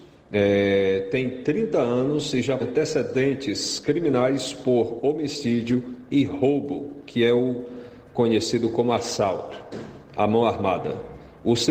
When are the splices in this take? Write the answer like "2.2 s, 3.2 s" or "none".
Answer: 2.6 s